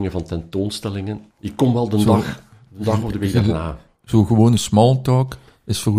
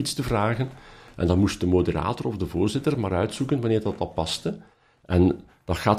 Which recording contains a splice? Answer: first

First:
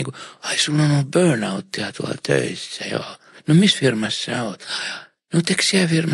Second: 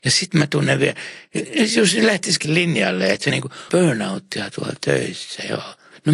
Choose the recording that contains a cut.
second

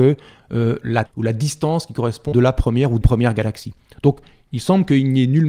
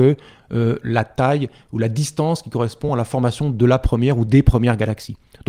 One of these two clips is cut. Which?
first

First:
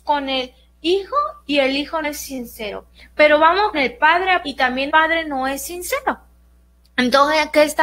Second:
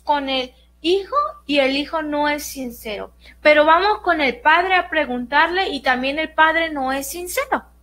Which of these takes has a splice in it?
first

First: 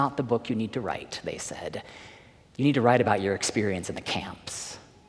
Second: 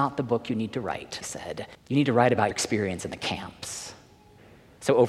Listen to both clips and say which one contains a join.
second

